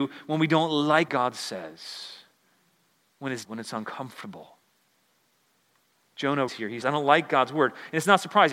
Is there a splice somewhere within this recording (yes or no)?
yes